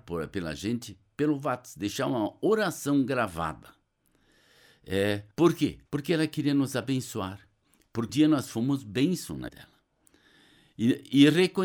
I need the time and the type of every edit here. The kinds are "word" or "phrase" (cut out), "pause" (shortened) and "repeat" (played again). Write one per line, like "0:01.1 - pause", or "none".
0:05.3 - pause
0:05.9 - pause
0:08.1 - word
0:09.5 - word